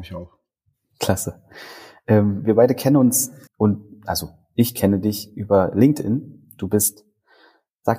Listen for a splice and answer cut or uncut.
cut